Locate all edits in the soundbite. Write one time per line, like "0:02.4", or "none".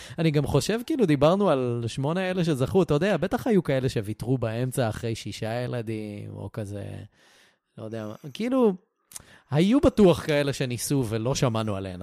none